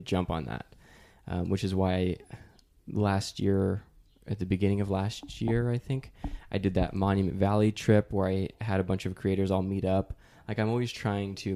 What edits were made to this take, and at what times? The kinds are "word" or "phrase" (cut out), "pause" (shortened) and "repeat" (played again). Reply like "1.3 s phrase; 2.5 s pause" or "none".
none